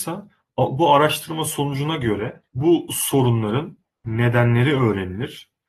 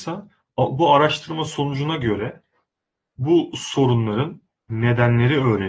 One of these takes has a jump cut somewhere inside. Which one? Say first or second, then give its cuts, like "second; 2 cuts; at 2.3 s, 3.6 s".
first; 1 cut; at 2.5 s